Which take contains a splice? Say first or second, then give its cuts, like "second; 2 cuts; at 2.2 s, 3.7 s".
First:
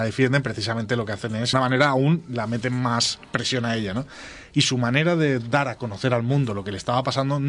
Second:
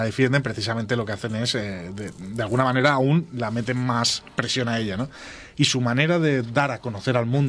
first; 1 cut; at 1.5 s